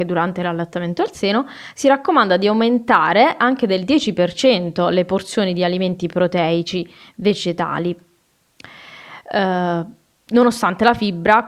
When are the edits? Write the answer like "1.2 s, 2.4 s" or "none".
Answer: none